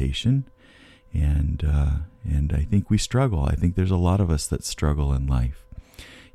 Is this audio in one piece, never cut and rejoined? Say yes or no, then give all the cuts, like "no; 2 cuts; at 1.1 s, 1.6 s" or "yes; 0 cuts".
yes; 0 cuts